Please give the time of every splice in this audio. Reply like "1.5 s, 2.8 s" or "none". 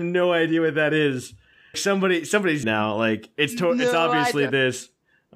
1.7 s, 2.6 s